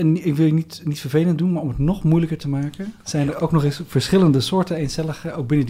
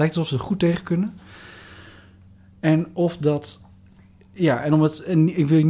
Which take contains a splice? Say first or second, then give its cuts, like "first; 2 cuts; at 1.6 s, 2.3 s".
first; 1 cut; at 3.0 s